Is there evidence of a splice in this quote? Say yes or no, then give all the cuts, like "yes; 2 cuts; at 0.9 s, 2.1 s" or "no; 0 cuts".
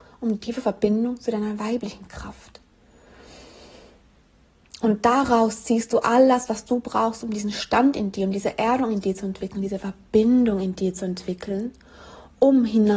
no; 0 cuts